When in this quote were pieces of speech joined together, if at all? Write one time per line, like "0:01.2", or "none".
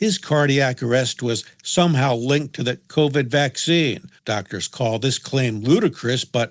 0:04.2